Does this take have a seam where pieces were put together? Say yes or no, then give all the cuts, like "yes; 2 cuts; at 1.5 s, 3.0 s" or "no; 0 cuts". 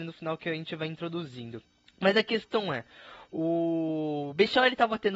yes; 1 cut; at 1.7 s